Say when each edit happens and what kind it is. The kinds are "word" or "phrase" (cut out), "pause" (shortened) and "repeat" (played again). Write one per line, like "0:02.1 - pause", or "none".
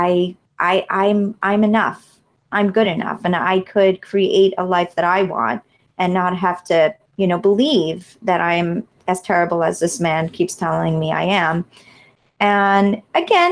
none

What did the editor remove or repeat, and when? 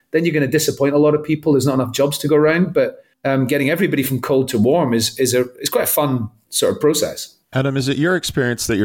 0:03.1 - pause
0:07.4 - pause

